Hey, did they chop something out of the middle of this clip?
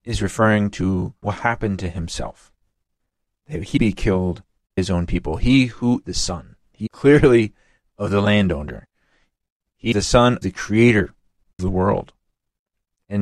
yes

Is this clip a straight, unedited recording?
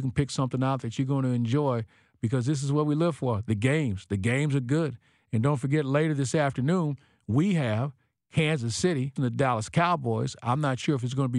no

